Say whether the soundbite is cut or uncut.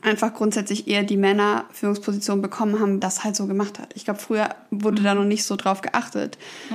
cut